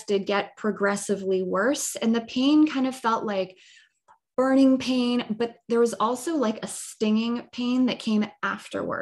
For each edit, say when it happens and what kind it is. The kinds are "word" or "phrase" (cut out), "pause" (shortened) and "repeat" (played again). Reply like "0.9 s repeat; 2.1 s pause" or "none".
none

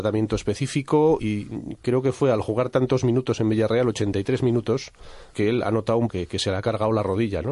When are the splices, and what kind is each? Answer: 1.2 s word; 5.3 s word; 6.1 s word

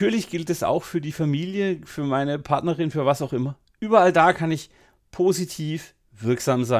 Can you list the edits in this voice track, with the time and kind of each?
none

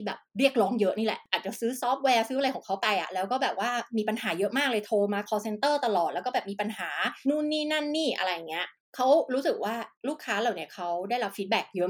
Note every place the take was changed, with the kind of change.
none

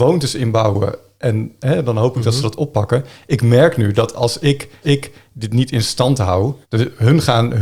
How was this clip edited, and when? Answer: 4.8 s repeat; 6.6 s pause

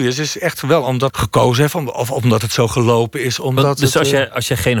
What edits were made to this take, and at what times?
1.1 s phrase

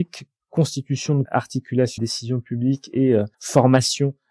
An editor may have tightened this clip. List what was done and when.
1.2 s word; 2.0 s phrase; 3.3 s pause

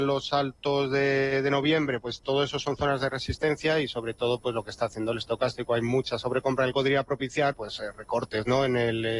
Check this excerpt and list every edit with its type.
6.7 s phrase; 7.5 s word

